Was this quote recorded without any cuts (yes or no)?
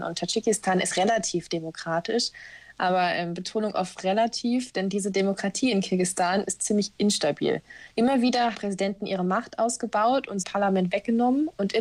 no